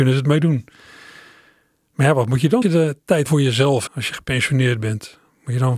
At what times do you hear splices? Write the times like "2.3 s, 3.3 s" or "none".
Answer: 2.6 s, 3.3 s, 3.9 s